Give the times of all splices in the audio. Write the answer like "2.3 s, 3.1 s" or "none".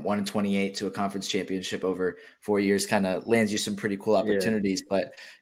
none